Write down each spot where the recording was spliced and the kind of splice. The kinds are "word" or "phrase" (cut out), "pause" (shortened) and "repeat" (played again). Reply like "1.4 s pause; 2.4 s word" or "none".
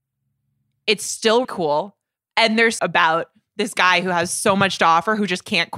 1.4 s word; 2.8 s phrase

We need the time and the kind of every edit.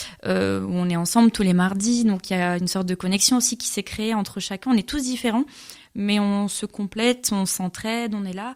none

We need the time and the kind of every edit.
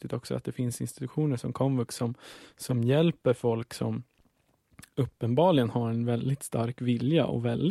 none

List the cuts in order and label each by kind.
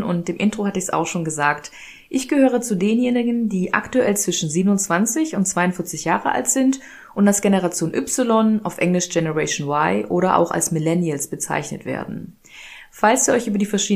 none

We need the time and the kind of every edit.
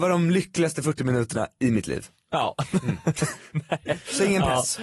none

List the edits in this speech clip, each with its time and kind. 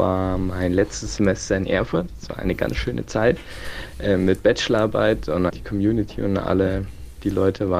5.5 s word

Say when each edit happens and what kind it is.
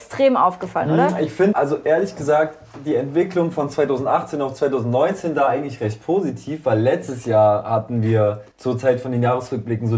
1.5 s word; 8.5 s pause

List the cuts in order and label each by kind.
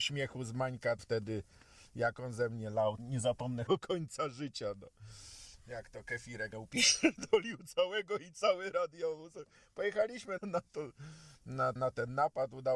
1.0 s word; 3.0 s word; 3.7 s word; 6.5 s word; 10.4 s word; 11.8 s word

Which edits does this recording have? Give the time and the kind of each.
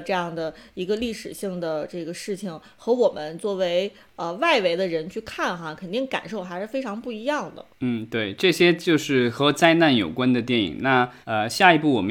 7.7 s pause; 11.2 s pause

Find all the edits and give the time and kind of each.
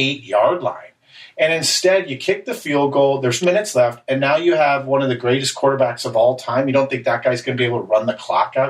3.4 s word

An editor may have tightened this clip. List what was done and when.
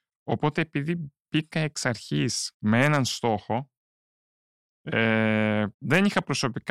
2.5 s pause; 5.7 s pause

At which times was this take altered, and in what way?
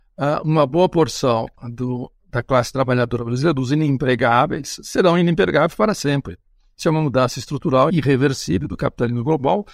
none

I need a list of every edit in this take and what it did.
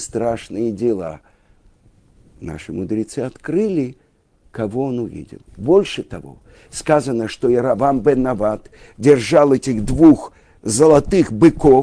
none

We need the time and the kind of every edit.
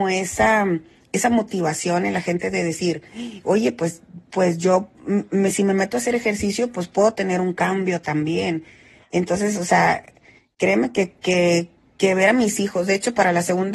none

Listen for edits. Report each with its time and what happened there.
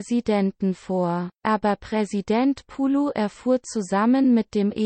1.3 s pause

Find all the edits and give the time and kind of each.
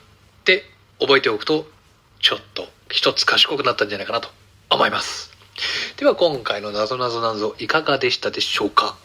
none

